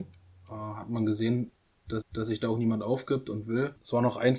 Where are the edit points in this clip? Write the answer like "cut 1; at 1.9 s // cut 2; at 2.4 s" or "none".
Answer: cut 1; at 2.0 s